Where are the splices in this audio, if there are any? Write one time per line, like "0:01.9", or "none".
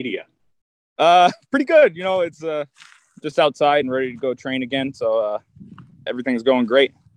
0:03.8
0:06.1